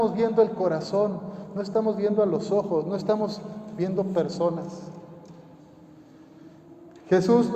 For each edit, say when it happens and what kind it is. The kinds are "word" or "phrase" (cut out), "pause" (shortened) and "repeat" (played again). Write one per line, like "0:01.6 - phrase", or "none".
none